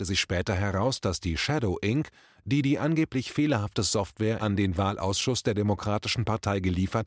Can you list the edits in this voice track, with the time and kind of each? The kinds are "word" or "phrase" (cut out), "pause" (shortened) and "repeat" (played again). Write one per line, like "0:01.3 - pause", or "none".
none